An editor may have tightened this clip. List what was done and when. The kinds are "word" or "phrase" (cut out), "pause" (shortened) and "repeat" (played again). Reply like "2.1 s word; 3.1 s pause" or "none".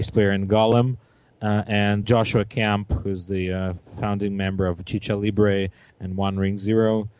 2.0 s word